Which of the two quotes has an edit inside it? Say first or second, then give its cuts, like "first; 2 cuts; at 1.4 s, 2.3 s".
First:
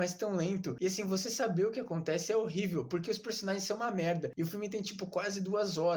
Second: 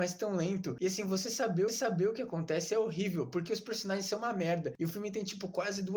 second; 1 cut; at 1.7 s